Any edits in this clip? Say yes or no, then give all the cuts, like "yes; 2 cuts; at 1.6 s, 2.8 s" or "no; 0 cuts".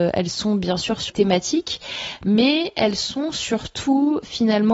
yes; 1 cut; at 1.1 s